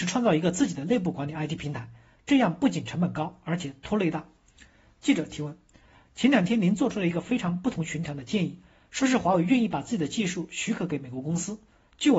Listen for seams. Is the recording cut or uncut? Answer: uncut